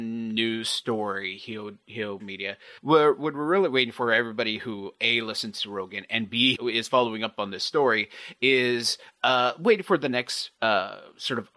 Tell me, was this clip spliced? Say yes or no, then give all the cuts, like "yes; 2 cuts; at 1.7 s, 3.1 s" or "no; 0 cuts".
yes; 4 cuts; at 2.2 s, 2.8 s, 6.5 s, 10.6 s